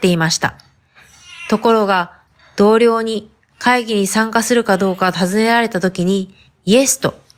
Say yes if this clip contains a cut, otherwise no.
no